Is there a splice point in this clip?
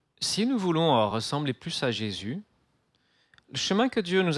no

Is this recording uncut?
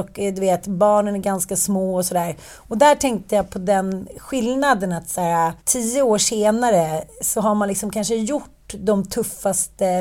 no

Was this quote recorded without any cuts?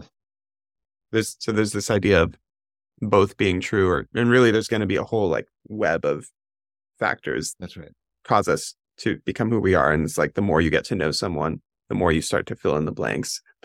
no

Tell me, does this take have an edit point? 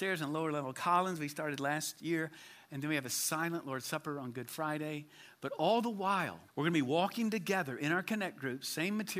yes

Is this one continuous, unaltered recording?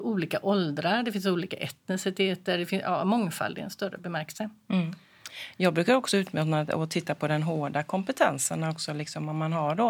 yes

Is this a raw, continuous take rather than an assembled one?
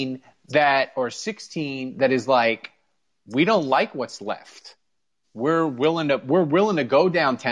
yes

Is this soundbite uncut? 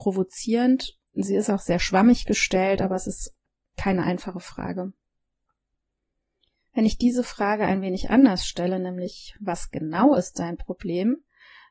no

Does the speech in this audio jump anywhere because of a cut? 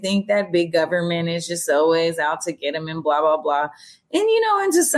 no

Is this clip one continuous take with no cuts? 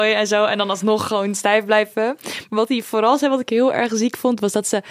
yes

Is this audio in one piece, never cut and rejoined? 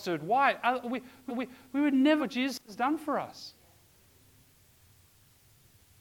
no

